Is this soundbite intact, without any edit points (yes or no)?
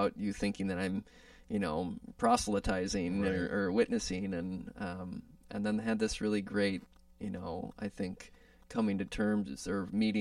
yes